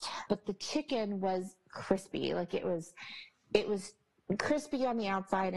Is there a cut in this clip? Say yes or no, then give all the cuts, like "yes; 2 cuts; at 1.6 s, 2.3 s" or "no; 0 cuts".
no; 0 cuts